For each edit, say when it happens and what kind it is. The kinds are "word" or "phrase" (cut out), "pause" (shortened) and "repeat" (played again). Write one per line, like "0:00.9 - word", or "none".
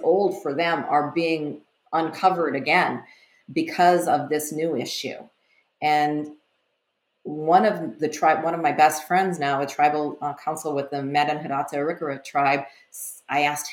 none